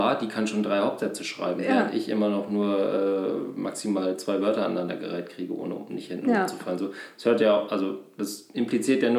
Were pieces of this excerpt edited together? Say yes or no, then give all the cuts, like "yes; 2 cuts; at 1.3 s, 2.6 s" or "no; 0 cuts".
no; 0 cuts